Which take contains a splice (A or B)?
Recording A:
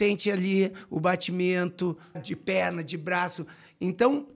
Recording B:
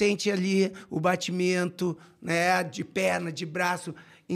A